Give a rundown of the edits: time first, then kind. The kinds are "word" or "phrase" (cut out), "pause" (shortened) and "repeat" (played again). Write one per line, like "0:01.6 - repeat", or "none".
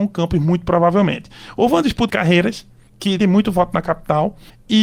0:02.1 - phrase
0:03.2 - phrase